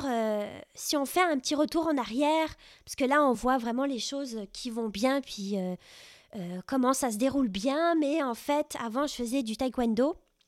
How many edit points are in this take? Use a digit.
0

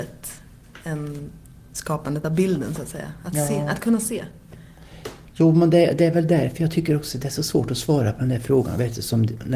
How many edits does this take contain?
0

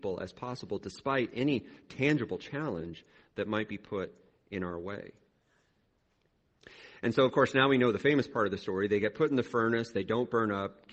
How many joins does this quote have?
0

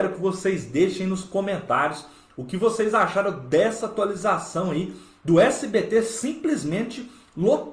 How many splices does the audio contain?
0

